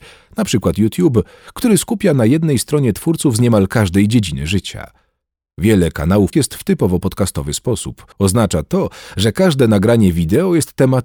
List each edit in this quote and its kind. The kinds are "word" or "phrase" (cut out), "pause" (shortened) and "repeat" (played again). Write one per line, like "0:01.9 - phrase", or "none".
0:06.3 - word
0:08.1 - pause